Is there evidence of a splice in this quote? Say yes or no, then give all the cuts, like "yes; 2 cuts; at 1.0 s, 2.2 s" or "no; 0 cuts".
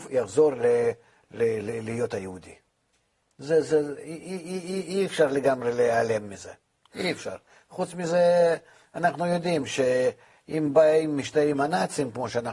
no; 0 cuts